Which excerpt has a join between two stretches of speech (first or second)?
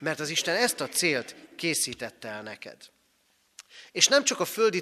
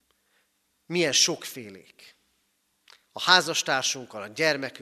second